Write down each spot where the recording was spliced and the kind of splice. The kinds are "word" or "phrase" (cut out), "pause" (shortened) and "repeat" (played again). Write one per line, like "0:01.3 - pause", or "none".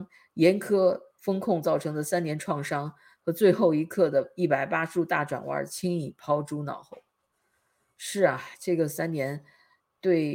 none